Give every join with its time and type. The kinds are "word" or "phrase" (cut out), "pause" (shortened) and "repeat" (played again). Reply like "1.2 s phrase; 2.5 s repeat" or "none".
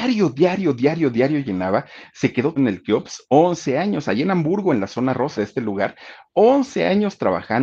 2.6 s word; 5.3 s word